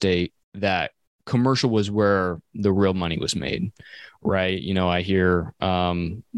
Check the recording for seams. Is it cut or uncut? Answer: uncut